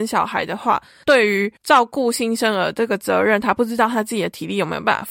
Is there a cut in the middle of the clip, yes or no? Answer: yes